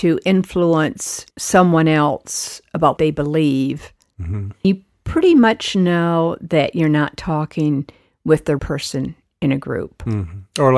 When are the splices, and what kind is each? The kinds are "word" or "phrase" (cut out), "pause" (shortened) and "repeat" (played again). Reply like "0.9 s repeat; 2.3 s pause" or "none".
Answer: 1.3 s pause; 3.0 s word; 4.6 s word; 8.6 s phrase